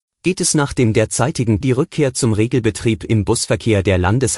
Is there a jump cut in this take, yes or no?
yes